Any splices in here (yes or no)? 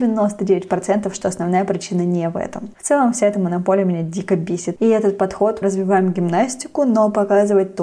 yes